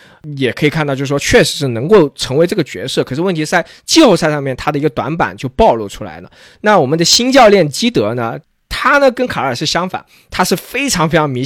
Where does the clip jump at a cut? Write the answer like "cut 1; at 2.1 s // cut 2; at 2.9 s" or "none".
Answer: none